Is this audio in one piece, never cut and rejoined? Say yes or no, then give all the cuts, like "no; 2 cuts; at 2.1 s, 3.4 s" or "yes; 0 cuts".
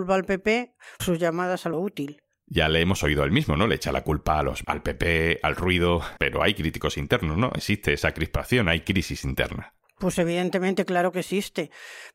no; 4 cuts; at 1.0 s, 1.7 s, 4.6 s, 6.2 s